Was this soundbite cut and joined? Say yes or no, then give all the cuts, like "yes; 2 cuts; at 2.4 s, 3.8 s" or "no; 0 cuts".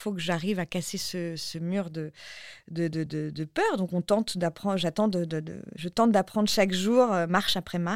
yes; 1 cut; at 3.1 s